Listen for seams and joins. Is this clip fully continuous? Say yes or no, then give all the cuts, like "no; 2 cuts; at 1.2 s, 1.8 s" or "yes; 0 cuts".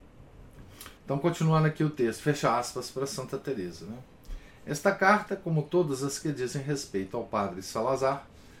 no; 1 cut; at 1.0 s